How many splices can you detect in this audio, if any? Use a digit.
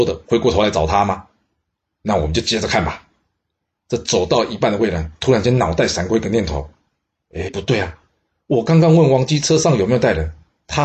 1